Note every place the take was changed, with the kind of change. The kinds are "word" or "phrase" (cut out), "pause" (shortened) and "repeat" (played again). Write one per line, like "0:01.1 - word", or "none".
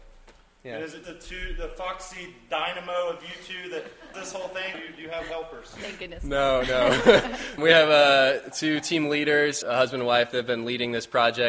0:01.0 - word
0:04.1 - word
0:04.7 - word
0:07.6 - word
0:09.6 - word